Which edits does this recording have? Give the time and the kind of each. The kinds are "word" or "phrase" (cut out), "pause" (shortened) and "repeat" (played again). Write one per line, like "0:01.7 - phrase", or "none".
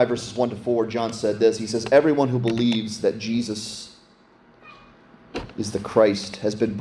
none